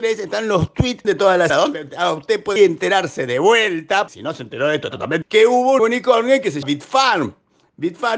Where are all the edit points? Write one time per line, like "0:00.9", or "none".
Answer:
0:01.0
0:01.5
0:02.6
0:04.1
0:04.9
0:05.2
0:05.8
0:06.6